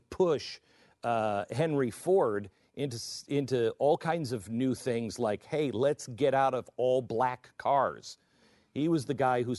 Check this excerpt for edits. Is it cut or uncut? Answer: uncut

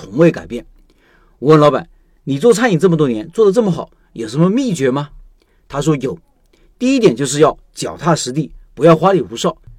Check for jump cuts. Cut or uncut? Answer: uncut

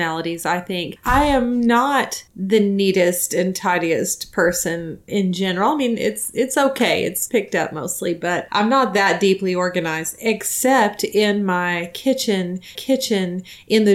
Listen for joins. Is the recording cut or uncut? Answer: cut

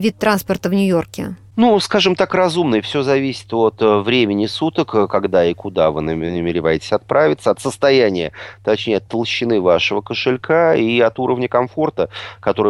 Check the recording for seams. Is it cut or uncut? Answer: uncut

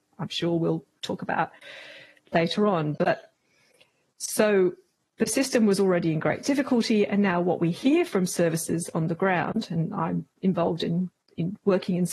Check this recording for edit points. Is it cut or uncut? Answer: uncut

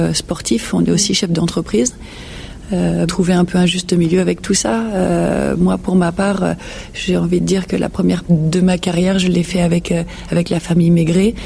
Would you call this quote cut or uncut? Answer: cut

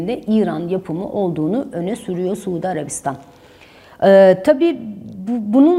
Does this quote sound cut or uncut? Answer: uncut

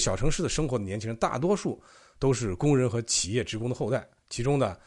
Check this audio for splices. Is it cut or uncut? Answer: uncut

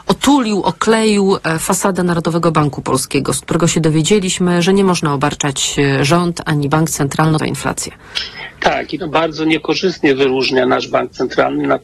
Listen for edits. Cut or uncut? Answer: cut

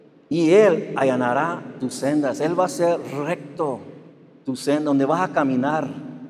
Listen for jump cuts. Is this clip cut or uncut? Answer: uncut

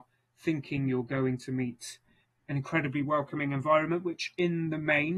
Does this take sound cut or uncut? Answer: uncut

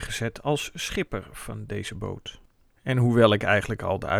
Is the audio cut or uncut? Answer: uncut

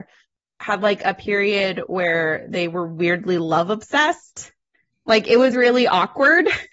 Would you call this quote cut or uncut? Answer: uncut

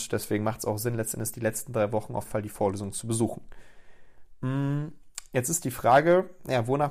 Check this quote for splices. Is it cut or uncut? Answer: cut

